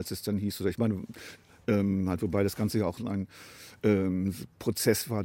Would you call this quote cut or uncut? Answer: uncut